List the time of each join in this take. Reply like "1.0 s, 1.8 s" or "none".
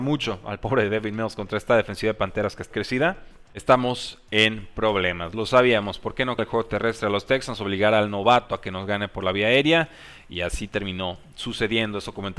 2.7 s, 6.4 s